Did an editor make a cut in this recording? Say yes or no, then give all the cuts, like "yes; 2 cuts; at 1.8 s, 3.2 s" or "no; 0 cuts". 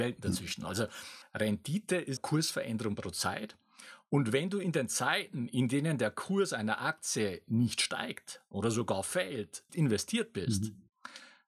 yes; 2 cuts; at 2.2 s, 9.7 s